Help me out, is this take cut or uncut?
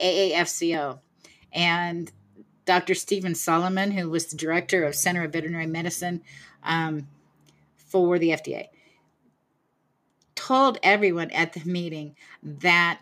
uncut